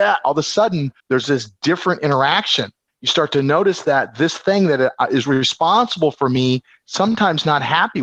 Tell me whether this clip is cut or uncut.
cut